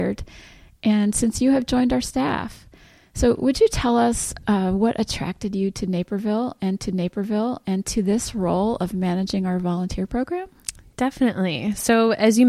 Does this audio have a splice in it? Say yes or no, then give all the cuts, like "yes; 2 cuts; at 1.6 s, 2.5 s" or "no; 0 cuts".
yes; 1 cut; at 6.8 s